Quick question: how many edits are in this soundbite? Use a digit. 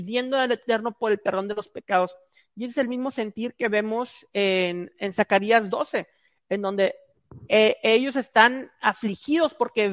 0